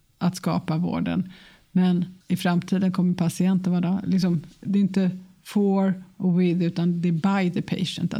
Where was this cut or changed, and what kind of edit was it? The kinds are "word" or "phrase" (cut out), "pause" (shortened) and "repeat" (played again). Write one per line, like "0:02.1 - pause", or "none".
0:02.2 - pause